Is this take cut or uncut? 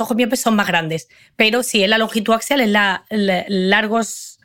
uncut